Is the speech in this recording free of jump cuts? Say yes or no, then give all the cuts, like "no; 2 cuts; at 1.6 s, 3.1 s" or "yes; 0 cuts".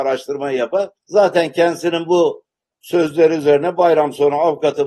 no; 1 cut; at 1.0 s